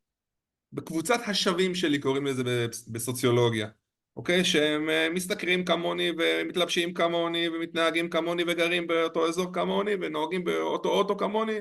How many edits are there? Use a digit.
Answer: 0